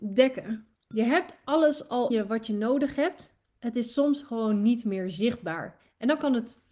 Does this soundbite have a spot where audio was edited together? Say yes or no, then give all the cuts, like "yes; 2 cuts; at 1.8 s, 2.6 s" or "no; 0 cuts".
yes; 1 cut; at 2.1 s